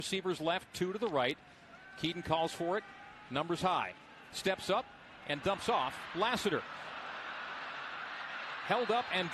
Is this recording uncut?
yes; 0 cuts

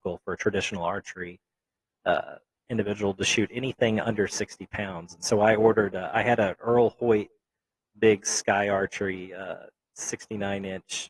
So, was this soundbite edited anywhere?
no; 0 cuts

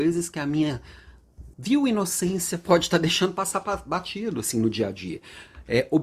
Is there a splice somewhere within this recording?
yes; 1 cut; at 1.5 s

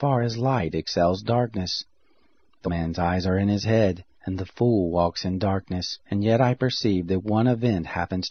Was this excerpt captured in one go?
no; 3 cuts; at 2.6 s, 4.1 s, 6.0 s

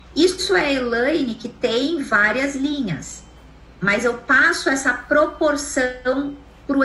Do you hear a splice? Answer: no; 0 cuts

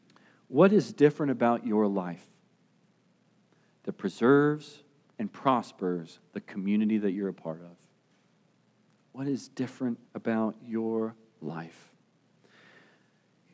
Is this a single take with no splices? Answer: no; 1 cut; at 10.1 s

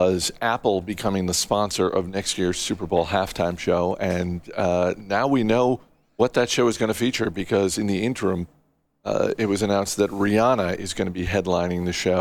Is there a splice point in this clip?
no; 0 cuts

